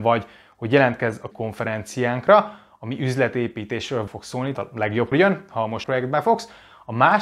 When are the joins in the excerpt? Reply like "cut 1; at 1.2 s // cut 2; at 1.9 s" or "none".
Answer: cut 1; at 1.3 s // cut 2; at 4.1 s // cut 3; at 4.6 s // cut 4; at 5.1 s // cut 5; at 5.8 s